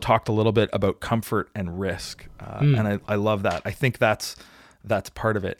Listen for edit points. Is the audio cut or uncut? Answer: uncut